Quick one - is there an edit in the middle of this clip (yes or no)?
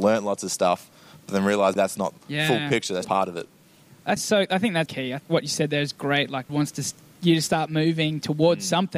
yes